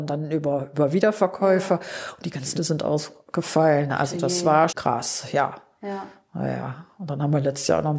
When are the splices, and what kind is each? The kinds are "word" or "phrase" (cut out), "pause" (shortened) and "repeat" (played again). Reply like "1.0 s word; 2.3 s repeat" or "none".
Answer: 2.5 s word; 4.7 s word